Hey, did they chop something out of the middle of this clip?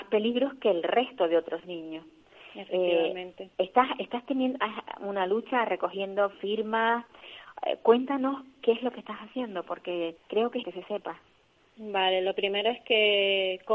yes; 3 cuts; at 3.5 s, 10.2 s, 10.6 s

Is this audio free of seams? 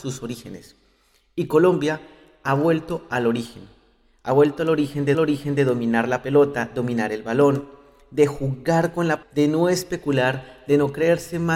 no; 2 cuts; at 5.1 s, 9.2 s

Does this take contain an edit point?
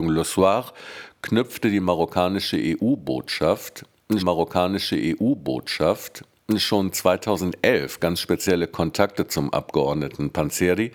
yes; 1 cut; at 4.2 s

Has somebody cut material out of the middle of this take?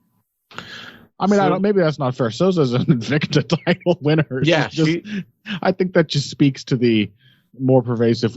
no; 0 cuts

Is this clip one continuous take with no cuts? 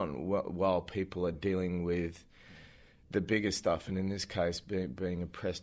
yes; 0 cuts

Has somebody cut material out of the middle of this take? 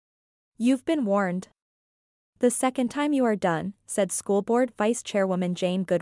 no; 0 cuts

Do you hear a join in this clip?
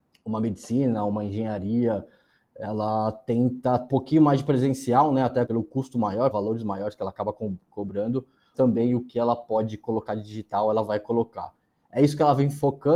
yes; 4 cuts; at 3.9 s, 5.5 s, 6.3 s, 8.5 s

